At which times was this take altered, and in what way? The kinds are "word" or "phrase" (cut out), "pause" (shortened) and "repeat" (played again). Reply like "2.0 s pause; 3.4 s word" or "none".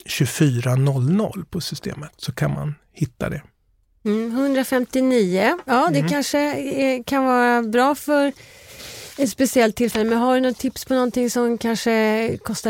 none